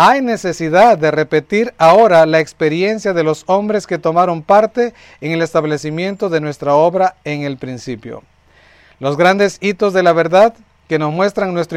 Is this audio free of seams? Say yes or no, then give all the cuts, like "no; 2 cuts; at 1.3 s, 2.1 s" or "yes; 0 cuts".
yes; 0 cuts